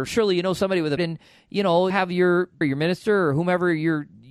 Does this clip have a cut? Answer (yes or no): yes